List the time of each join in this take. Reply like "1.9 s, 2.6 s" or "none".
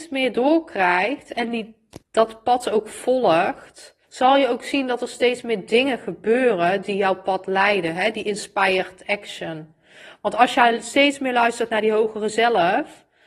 2.0 s, 4.0 s